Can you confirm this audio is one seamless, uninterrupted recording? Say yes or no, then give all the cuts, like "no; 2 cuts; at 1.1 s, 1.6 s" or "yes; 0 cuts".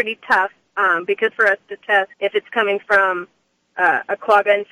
no; 2 cuts; at 1.3 s, 2.1 s